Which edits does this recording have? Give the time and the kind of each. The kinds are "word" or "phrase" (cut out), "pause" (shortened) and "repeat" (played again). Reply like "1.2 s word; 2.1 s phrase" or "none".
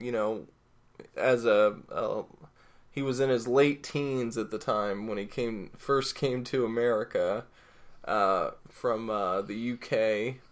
none